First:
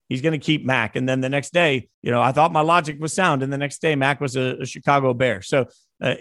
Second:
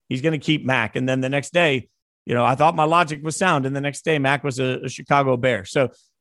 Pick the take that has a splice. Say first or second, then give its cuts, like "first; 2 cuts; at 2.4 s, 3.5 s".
first; 1 cut; at 1.9 s